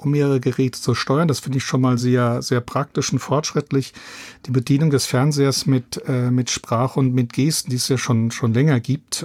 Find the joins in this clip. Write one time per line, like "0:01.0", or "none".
none